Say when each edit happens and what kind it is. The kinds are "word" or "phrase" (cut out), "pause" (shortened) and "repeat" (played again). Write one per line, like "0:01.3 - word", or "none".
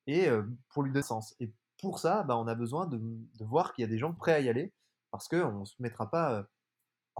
0:01.0 - word
0:04.2 - word